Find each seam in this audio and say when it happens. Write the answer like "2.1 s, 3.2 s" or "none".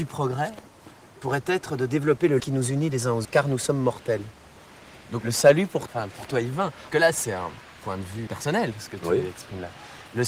2.4 s, 3.2 s, 5.2 s, 5.9 s, 6.9 s, 8.3 s